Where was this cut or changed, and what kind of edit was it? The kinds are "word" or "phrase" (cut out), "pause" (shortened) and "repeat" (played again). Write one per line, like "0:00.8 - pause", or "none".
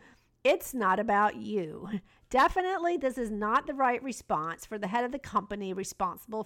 none

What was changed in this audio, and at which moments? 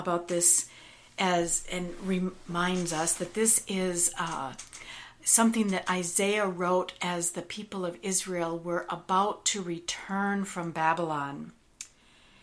none

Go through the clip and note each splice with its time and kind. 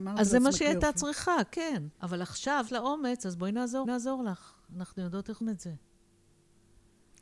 0:01.9 - pause
0:02.7 - word
0:03.8 - repeat
0:05.4 - word

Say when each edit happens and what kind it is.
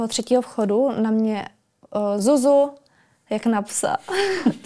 0:02.2 - word

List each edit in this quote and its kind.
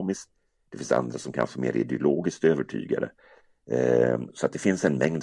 none

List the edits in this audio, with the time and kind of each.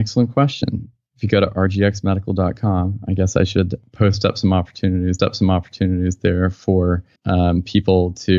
0:05.2 - repeat
0:07.2 - pause

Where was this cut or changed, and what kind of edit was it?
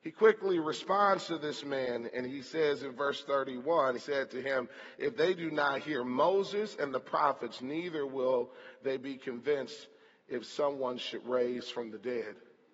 0:04.0 - word

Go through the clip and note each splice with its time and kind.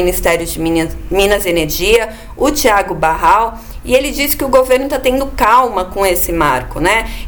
none

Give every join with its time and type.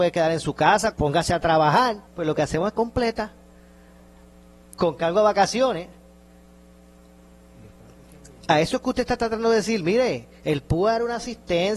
0:00.9 - phrase
0:02.1 - pause
0:02.7 - phrase

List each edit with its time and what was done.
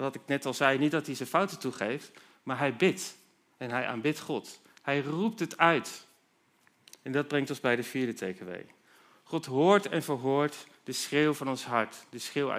none

